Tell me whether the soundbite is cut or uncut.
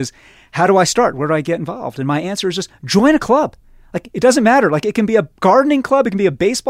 uncut